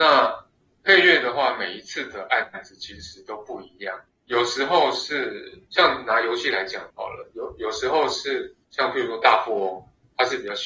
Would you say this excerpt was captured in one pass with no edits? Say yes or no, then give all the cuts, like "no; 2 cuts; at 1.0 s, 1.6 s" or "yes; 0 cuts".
no; 4 cuts; at 4.1 s, 5.7 s, 6.9 s, 8.6 s